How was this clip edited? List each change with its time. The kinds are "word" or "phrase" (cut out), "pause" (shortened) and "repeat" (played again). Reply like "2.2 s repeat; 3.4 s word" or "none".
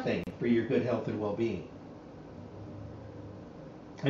none